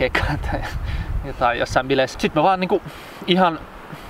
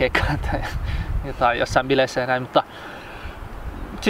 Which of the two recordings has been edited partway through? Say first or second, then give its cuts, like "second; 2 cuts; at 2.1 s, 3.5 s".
first; 1 cut; at 2.1 s